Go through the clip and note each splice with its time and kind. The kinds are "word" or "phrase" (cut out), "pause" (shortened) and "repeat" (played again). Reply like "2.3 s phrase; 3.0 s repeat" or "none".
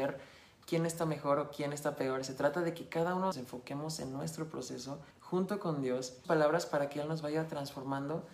3.3 s phrase; 5.1 s pause; 6.2 s phrase